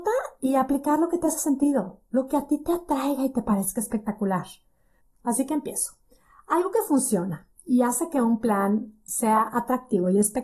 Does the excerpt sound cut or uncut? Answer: uncut